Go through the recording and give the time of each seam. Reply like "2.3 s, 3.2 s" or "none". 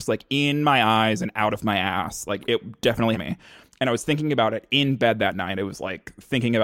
2.4 s, 3.1 s